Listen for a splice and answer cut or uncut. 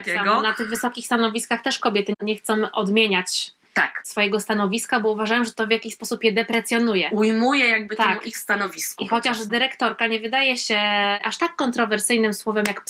uncut